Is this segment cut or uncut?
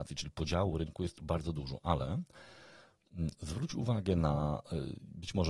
uncut